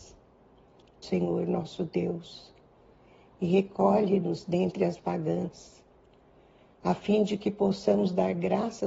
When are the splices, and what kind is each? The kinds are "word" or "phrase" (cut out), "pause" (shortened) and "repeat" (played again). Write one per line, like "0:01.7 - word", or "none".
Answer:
0:01.0 - word
0:05.0 - word